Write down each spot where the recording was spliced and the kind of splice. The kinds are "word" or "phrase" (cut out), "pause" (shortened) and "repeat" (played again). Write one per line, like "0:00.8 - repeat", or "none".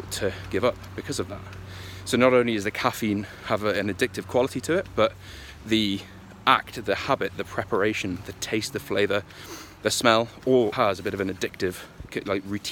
0:10.7 - word